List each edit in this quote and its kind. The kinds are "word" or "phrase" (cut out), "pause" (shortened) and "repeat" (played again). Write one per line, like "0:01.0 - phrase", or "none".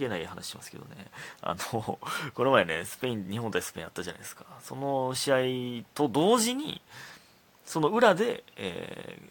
none

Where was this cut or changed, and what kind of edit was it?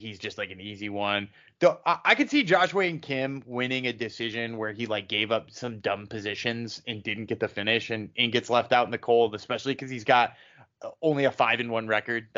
none

